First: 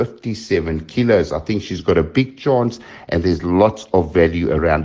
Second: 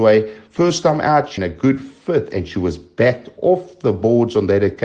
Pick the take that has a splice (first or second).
second